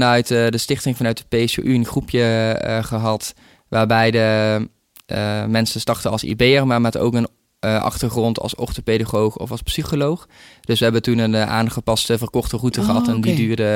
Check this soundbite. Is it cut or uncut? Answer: uncut